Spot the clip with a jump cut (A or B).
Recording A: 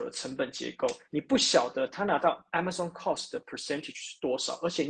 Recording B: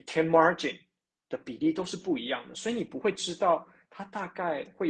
A